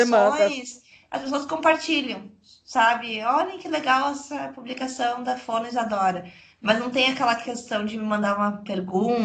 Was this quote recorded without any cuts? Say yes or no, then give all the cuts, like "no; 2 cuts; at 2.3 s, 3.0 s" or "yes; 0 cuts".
yes; 0 cuts